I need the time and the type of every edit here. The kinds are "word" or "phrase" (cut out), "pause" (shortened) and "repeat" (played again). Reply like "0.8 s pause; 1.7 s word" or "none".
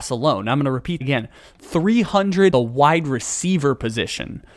1.0 s word; 2.5 s word